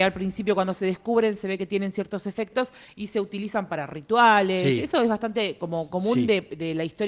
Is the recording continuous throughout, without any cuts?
yes; 0 cuts

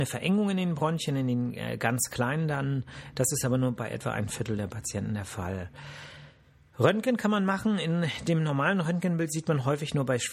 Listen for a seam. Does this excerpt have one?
no; 0 cuts

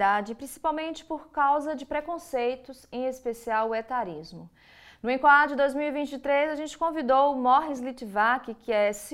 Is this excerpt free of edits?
yes; 0 cuts

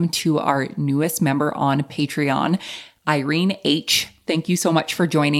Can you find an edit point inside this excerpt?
no; 0 cuts

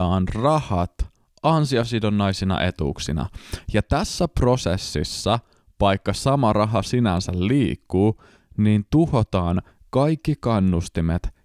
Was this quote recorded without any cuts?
yes; 0 cuts

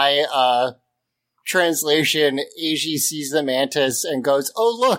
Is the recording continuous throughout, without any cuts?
yes; 0 cuts

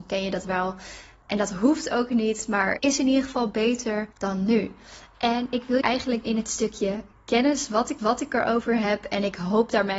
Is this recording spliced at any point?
yes; 5 cuts; at 2.8 s, 4.1 s, 5.8 s, 6.2 s, 8.0 s

